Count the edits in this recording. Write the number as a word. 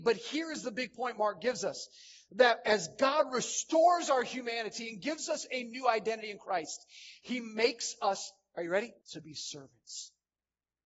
one